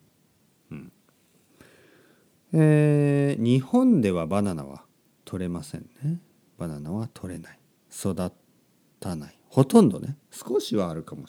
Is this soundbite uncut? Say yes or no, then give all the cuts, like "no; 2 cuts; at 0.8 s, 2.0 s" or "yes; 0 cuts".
yes; 0 cuts